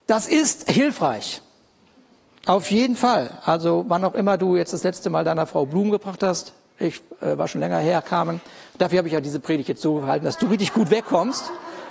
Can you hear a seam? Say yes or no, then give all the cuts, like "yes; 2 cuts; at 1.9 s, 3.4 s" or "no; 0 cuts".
no; 0 cuts